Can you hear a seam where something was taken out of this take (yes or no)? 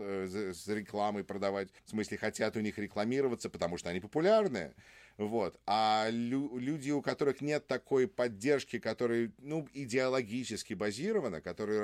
yes